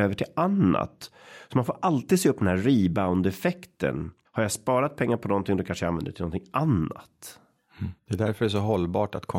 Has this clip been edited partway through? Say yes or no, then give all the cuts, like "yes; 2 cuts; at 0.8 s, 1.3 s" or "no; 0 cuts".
yes; 2 cuts; at 4.2 s, 8.0 s